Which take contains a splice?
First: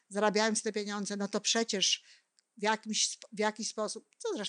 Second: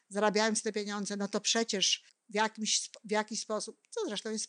second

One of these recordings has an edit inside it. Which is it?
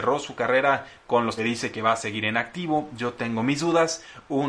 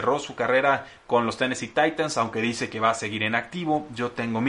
first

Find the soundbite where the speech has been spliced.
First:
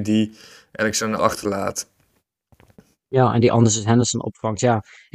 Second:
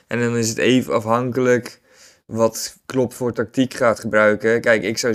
first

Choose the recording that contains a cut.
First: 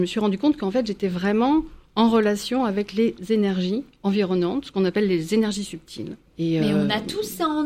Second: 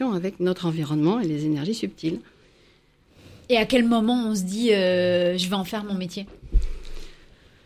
first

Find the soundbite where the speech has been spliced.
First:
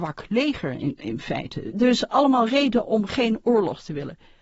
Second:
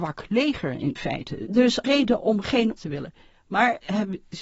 second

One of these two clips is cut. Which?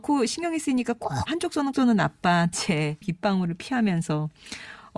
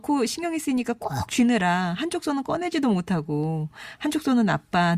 first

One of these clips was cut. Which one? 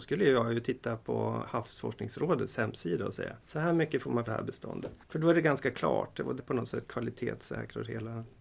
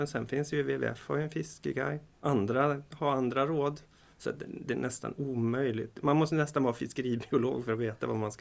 first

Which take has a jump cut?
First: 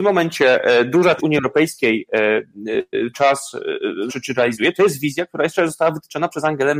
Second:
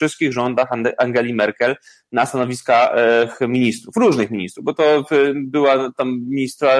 first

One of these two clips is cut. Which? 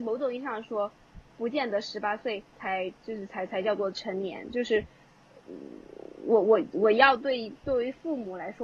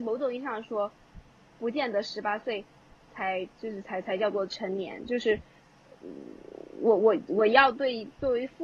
first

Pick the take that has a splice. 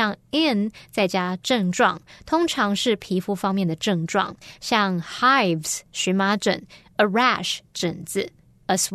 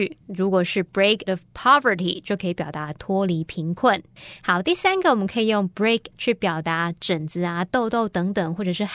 second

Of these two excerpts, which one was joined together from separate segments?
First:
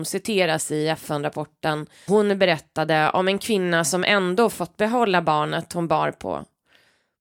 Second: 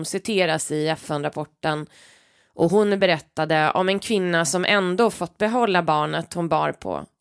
first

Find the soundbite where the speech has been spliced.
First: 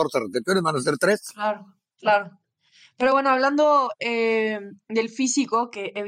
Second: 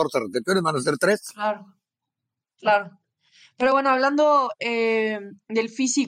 first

